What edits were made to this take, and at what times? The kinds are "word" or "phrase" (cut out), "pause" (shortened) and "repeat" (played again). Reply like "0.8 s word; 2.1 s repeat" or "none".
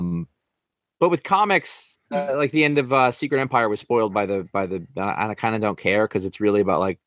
2.0 s pause

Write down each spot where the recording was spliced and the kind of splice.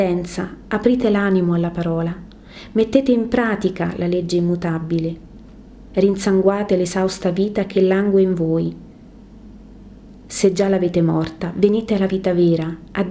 none

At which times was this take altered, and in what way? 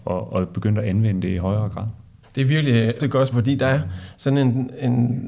2.2 s pause; 3.0 s word; 3.3 s word

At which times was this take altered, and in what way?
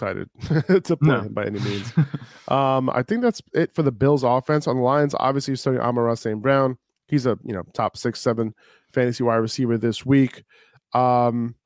none

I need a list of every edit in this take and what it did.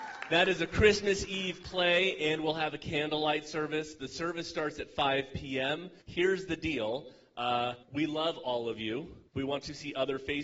6.0 s pause; 7.8 s pause; 9.3 s pause

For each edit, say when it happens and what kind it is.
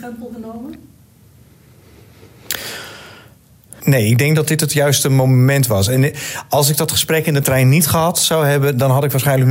none

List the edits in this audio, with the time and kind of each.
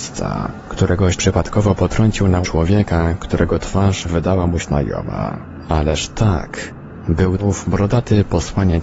1.2 s word; 2.4 s word; 4.6 s word; 7.4 s word

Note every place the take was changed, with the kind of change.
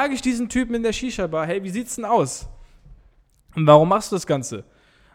none

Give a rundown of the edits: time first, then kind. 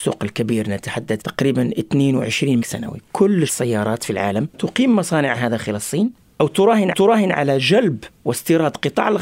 1.2 s word; 2.6 s phrase; 3.5 s word; 4.5 s word; 6.9 s repeat

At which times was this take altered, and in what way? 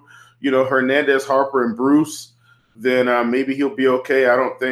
none

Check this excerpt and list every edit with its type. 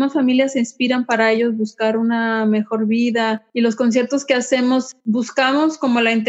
3.5 s pause; 5.0 s pause

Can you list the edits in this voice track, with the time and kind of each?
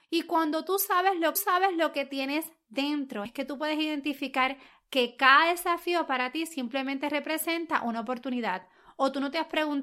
1.4 s repeat; 3.3 s word

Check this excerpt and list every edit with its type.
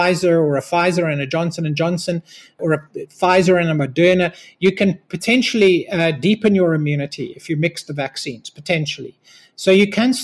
none

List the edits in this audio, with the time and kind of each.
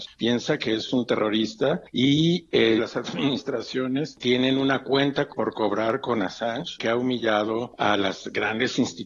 2.8 s phrase; 6.8 s phrase

